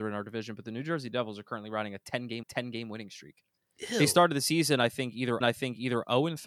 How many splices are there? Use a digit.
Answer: 2